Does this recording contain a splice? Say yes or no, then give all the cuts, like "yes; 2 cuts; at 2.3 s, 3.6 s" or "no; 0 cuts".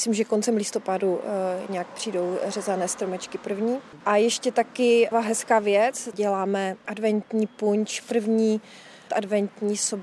yes; 2 cuts; at 5.1 s, 9.1 s